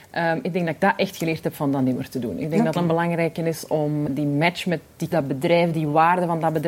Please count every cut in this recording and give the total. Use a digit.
3